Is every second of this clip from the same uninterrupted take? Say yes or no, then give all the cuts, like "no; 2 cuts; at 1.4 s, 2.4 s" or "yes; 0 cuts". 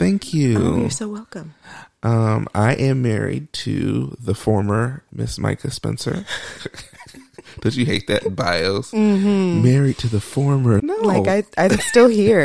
no; 1 cut; at 10.8 s